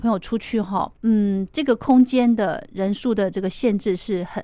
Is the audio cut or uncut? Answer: cut